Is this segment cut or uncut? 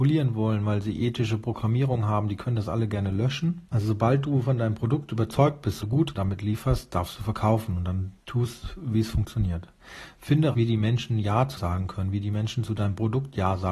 cut